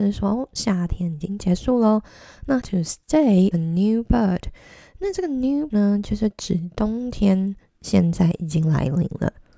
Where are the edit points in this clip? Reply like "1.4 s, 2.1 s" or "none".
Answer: 2.6 s, 3.5 s, 5.7 s

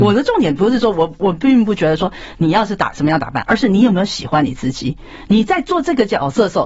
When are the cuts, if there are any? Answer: none

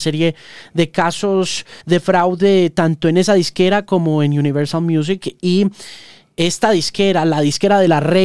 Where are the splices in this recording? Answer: 1.8 s

